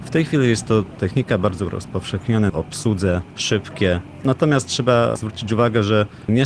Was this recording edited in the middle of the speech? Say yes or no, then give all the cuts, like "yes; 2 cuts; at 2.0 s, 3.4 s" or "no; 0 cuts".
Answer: yes; 2 cuts; at 1.0 s, 2.5 s